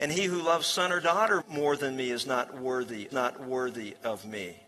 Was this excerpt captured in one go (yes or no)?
no